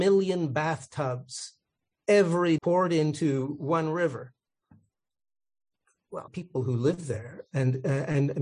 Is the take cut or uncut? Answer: cut